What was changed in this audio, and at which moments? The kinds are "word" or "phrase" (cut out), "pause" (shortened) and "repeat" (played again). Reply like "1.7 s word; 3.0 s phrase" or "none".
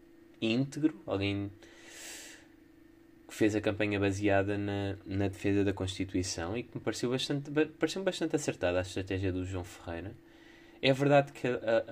none